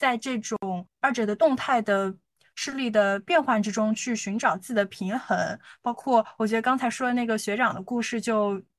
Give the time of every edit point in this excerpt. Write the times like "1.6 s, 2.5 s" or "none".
none